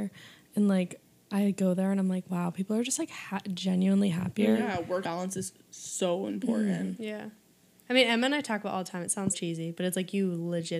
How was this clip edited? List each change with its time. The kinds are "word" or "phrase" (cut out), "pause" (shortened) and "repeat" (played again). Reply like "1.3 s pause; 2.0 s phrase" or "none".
5.0 s word; 9.3 s word